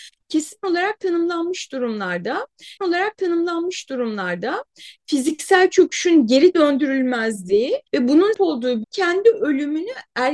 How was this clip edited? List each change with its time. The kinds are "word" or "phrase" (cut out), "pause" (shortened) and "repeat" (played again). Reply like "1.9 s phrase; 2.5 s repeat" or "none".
2.8 s repeat; 7.9 s pause; 8.3 s word; 8.8 s phrase